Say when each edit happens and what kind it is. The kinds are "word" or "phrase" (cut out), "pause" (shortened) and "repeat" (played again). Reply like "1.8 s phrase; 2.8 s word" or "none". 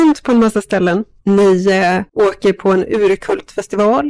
2.1 s pause